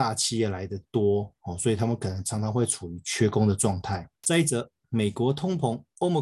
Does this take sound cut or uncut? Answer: cut